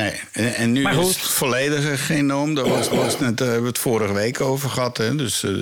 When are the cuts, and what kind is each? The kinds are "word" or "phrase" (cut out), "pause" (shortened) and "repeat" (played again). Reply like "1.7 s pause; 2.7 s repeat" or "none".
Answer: 2.9 s repeat